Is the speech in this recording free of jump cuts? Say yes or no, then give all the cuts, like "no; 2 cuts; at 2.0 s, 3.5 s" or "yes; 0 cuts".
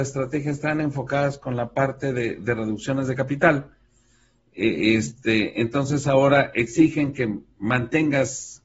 yes; 0 cuts